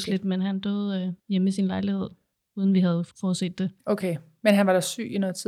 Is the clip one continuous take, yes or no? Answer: no